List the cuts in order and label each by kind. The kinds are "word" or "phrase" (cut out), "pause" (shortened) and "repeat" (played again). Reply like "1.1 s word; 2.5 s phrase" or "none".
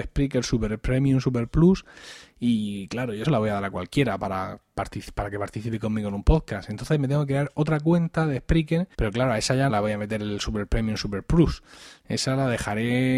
3.2 s phrase; 8.9 s pause; 9.7 s word